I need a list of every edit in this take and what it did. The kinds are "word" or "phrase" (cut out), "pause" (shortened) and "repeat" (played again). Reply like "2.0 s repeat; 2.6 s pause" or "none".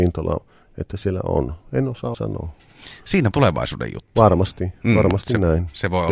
2.1 s word; 3.3 s phrase

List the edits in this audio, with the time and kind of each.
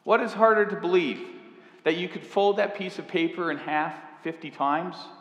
none

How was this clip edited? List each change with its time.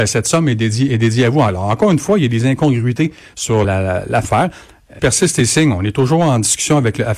3.6 s word; 4.2 s word; 5.0 s word

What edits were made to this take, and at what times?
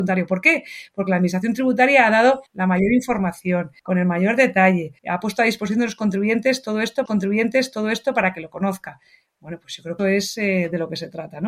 2.5 s pause; 3.8 s pause; 5.0 s pause; 7.1 s repeat; 10.0 s phrase

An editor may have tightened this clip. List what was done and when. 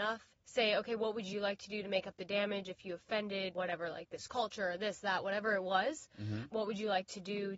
none

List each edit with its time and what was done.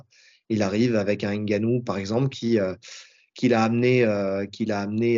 none

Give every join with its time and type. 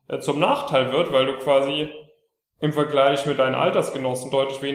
none

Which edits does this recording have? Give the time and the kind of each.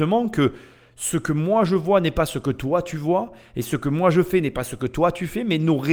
none

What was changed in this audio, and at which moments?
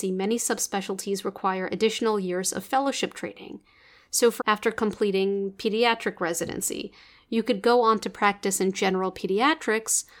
4.4 s word

